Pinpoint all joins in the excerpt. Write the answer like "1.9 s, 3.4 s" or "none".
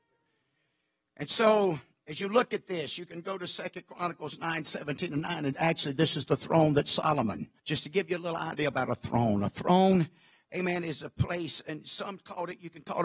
7.6 s